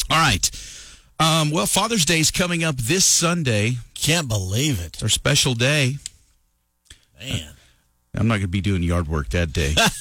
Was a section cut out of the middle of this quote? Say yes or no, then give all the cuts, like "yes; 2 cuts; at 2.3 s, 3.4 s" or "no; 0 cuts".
no; 0 cuts